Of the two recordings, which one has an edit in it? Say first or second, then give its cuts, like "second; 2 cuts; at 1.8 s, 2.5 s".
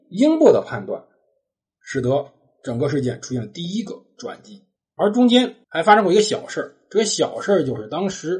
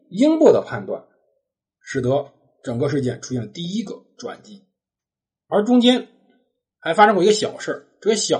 first; 2 cuts; at 4.8 s, 5.6 s